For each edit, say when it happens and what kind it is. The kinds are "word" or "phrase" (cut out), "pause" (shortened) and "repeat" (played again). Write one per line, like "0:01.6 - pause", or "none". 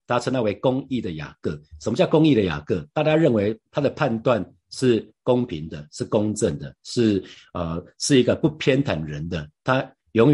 0:03.7 - pause